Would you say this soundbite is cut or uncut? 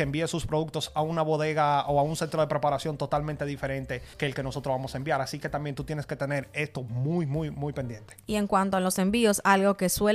cut